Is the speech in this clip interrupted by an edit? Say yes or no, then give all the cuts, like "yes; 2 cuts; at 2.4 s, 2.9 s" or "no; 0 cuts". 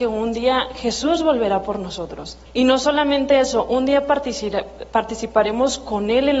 yes; 1 cut; at 2.5 s